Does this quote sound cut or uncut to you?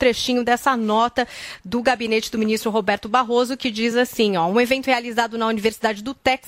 uncut